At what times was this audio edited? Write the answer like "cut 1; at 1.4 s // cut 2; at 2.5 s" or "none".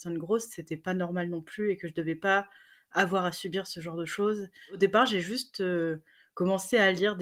none

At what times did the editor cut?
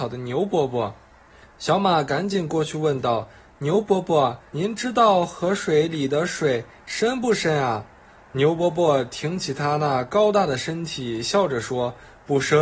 cut 1; at 1.3 s // cut 2; at 4.5 s

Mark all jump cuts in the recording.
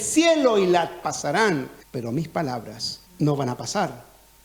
cut 1; at 1.0 s // cut 2; at 1.8 s // cut 3; at 3.1 s

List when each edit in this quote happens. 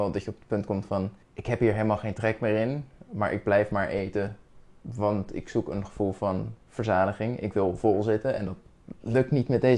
cut 1; at 1.2 s

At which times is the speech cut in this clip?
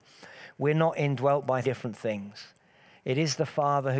cut 1; at 1.6 s

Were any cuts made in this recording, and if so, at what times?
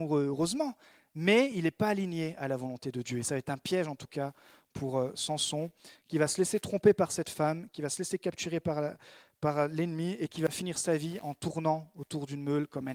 none

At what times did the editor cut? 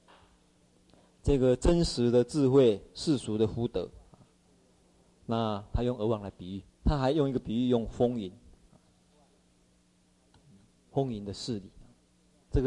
cut 1; at 6.7 s

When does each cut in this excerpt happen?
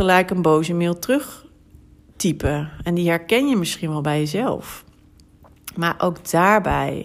none

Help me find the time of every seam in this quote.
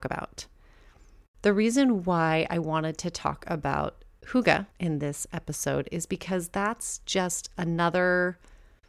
cut 1; at 4.7 s

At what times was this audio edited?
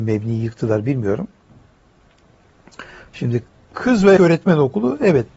cut 1; at 4.2 s

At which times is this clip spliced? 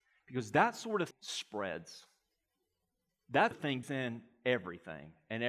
cut 1; at 1.1 s // cut 2; at 3.5 s // cut 3; at 3.8 s

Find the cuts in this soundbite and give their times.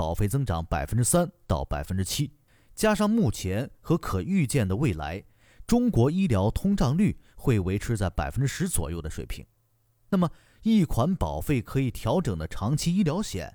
cut 1; at 2.5 s

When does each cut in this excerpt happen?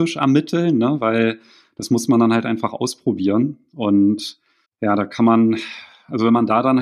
cut 1; at 4.6 s

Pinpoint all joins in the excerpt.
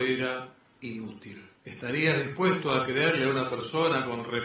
cut 1; at 1.6 s

